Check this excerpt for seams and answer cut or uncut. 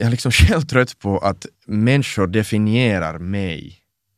cut